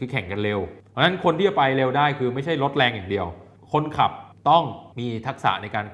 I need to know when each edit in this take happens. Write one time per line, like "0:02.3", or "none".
0:04.9